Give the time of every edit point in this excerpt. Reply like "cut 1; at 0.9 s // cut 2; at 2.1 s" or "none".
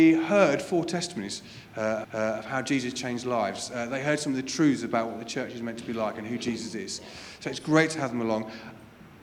cut 1; at 2.0 s